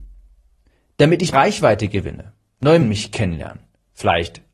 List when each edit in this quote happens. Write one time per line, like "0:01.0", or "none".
0:01.3
0:02.8